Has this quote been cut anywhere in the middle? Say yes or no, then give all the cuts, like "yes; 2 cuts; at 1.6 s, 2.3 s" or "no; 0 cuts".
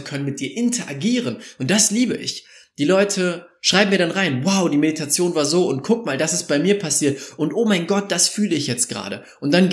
no; 0 cuts